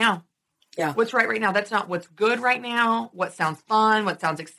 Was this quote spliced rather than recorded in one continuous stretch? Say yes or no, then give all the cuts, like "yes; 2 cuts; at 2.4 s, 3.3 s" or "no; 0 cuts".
no; 0 cuts